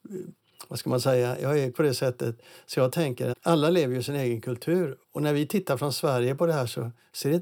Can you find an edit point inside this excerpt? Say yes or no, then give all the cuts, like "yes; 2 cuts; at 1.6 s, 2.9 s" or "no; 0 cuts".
yes; 3 cuts; at 1.7 s, 3.3 s, 5.0 s